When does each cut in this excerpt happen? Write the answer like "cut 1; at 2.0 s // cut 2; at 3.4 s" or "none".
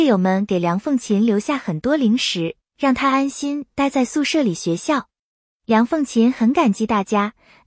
none